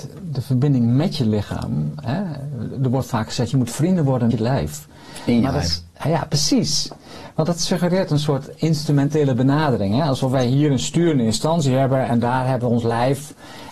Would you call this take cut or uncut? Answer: cut